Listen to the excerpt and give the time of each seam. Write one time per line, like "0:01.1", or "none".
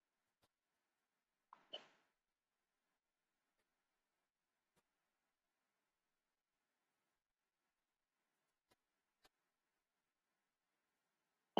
none